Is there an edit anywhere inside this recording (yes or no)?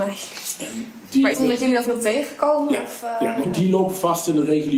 yes